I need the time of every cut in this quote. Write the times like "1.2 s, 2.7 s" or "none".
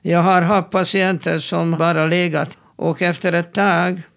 1.7 s, 2.5 s